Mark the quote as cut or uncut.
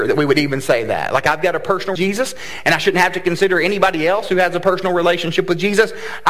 cut